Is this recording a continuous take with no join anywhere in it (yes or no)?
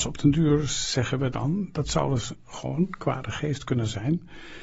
yes